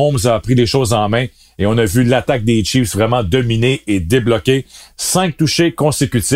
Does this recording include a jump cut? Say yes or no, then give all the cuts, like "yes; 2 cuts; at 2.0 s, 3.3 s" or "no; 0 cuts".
no; 0 cuts